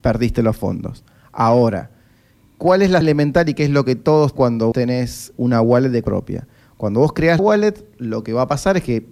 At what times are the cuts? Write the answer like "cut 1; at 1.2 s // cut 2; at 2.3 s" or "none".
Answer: cut 1; at 3.0 s // cut 2; at 4.4 s // cut 3; at 4.7 s // cut 4; at 5.3 s // cut 5; at 6.0 s // cut 6; at 7.4 s